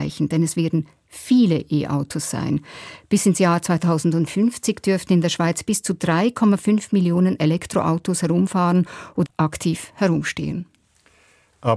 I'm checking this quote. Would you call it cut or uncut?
cut